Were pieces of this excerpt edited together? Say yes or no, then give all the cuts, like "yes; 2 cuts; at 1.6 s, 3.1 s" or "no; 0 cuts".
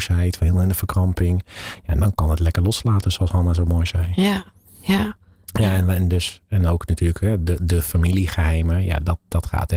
no; 0 cuts